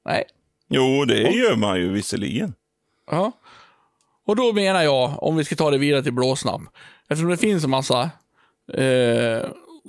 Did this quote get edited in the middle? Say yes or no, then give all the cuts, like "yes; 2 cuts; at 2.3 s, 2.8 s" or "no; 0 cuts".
no; 0 cuts